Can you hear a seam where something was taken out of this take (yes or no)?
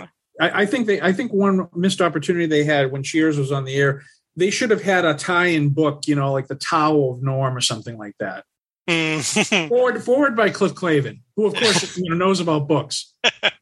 no